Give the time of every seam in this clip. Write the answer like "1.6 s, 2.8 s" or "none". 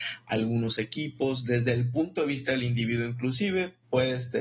none